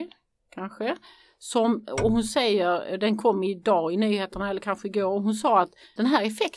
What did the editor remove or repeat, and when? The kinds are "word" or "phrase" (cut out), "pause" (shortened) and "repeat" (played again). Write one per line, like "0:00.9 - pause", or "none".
none